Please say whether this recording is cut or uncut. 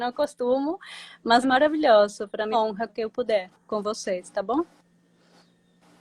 cut